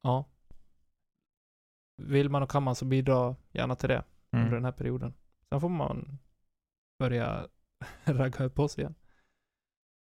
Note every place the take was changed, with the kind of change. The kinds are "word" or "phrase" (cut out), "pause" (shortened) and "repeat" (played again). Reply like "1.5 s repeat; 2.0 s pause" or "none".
none